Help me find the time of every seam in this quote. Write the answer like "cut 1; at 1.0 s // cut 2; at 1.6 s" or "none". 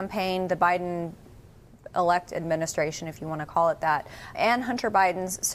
cut 1; at 4.3 s